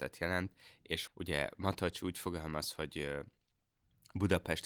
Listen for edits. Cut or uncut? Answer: cut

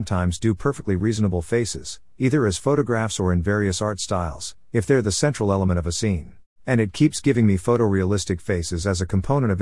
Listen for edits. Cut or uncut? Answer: cut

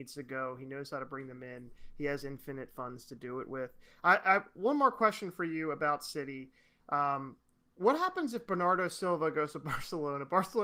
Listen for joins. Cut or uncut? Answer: uncut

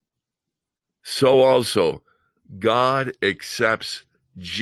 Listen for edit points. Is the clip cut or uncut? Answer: uncut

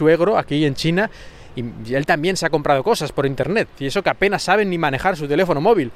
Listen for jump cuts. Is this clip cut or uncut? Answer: uncut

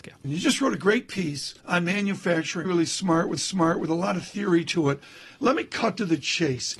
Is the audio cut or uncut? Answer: cut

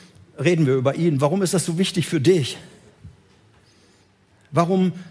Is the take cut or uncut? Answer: uncut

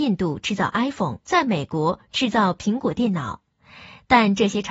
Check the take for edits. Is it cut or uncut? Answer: cut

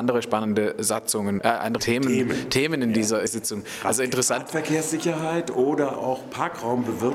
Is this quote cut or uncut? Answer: cut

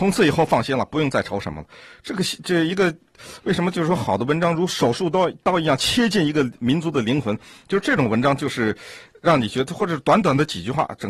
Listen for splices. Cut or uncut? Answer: uncut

